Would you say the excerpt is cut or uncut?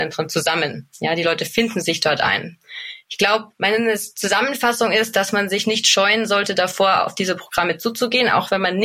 cut